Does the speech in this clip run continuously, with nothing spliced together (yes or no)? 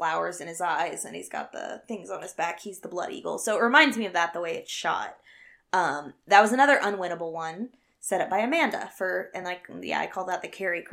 yes